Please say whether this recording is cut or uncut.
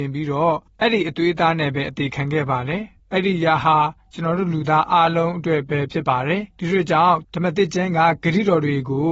cut